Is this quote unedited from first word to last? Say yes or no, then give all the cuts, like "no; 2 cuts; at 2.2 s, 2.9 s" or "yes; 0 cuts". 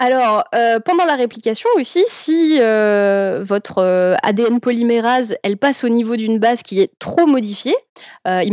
yes; 0 cuts